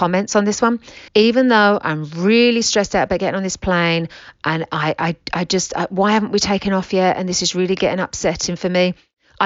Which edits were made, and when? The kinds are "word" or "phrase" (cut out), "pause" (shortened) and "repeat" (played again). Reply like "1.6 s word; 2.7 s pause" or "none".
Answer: 1.1 s pause

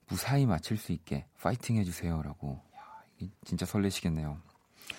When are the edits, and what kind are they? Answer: 1.3 s pause; 3.4 s pause

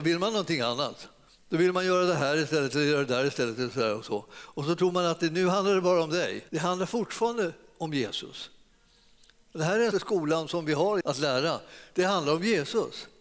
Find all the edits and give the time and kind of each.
1.3 s pause; 6.5 s pause; 9.9 s word; 11.0 s word

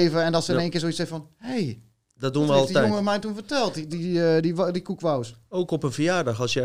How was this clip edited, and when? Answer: none

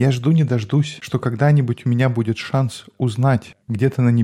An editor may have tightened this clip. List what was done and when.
none

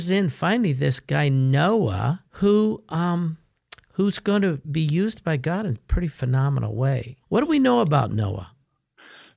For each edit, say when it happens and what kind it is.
2.3 s pause; 7.2 s pause

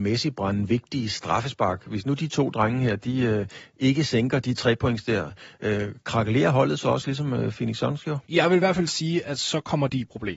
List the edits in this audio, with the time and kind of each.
8.2 s pause

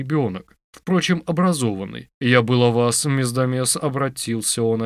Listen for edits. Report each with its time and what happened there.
2.1 s pause

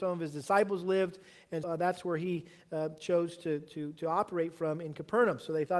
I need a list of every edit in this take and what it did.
1.6 s word

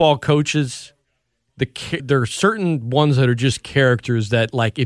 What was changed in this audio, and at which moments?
2.0 s word

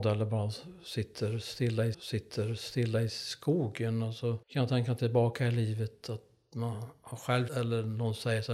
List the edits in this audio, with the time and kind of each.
1.9 s repeat; 4.4 s pause; 7.5 s word

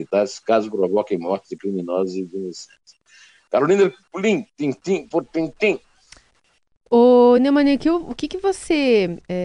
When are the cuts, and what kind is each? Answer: none

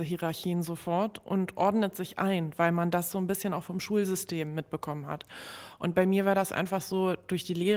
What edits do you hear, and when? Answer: none

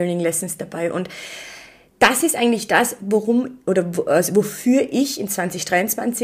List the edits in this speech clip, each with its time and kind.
none

